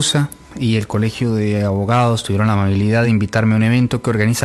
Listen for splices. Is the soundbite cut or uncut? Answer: uncut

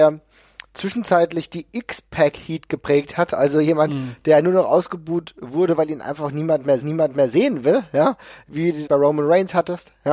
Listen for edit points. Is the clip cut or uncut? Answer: cut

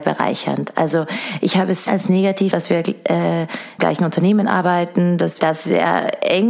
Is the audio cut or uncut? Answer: cut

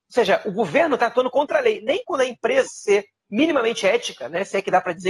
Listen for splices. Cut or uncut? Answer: cut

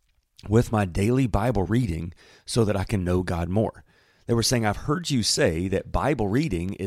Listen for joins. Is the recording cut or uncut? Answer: uncut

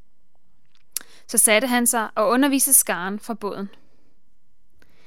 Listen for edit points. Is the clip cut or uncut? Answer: uncut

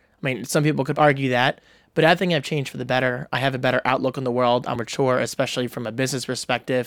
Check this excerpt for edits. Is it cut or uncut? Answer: cut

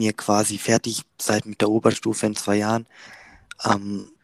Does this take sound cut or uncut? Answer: uncut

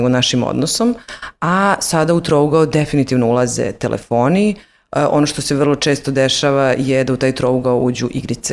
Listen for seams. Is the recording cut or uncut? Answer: uncut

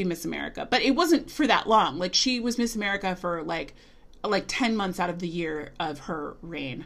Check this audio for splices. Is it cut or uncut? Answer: uncut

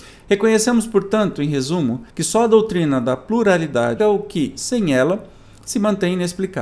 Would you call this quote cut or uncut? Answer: cut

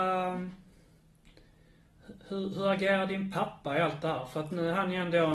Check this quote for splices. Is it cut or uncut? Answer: uncut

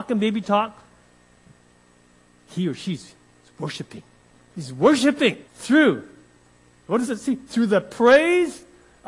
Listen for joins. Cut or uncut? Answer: cut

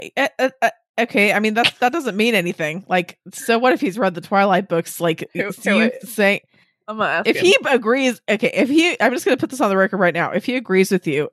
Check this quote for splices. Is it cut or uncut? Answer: uncut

